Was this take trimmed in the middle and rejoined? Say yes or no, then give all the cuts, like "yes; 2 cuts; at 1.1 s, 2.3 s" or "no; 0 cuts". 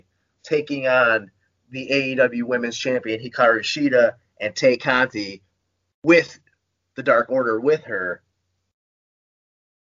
no; 0 cuts